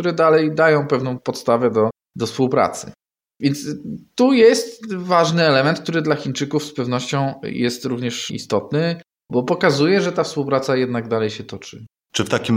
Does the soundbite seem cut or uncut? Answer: uncut